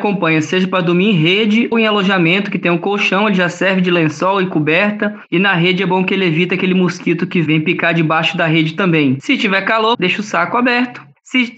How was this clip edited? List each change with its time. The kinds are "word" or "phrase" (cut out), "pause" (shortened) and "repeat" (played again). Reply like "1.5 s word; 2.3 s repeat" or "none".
1.7 s word; 9.9 s word

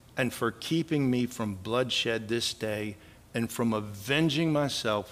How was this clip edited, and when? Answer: none

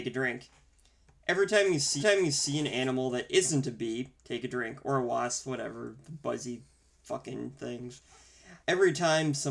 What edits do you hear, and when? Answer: 2.0 s repeat; 4.2 s pause; 8.6 s pause

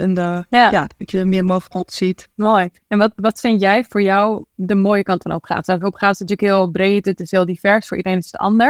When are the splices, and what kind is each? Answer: 2.3 s pause

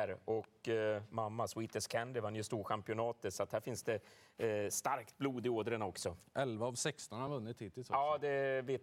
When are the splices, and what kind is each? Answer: none

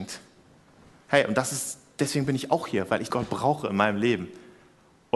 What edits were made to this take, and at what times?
3.1 s word

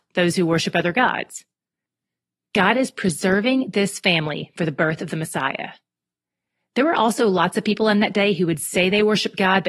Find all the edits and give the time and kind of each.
none

